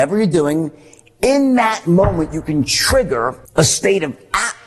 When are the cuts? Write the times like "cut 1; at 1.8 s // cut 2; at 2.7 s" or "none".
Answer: cut 1; at 3.5 s